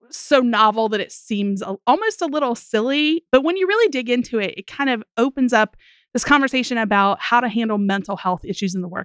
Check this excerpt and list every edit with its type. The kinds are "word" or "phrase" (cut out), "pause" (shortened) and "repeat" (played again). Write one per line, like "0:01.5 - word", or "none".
none